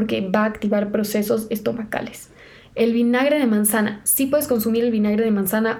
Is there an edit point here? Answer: no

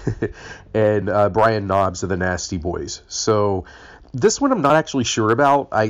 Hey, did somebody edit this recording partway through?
no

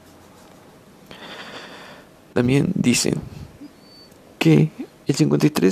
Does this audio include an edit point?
no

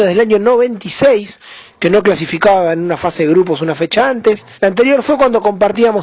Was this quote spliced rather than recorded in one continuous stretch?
yes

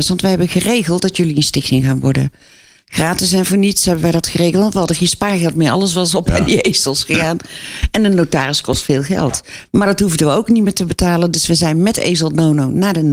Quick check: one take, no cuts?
yes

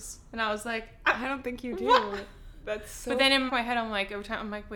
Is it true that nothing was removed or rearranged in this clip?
no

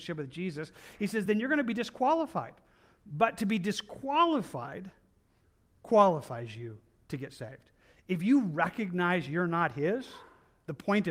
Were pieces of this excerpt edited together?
no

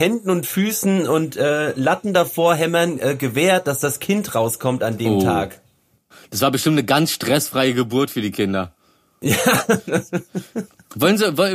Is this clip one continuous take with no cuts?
yes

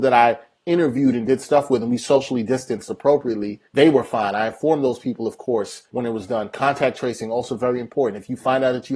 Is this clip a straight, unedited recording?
no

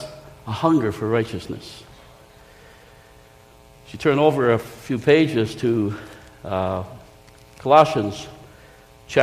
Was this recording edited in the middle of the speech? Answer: no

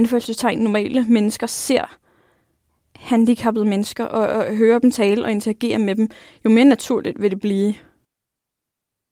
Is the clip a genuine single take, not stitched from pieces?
yes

